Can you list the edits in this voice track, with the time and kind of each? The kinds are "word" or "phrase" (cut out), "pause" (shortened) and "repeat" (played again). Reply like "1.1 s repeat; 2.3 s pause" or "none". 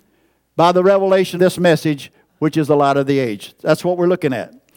1.4 s word